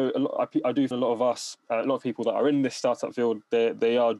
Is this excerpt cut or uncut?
cut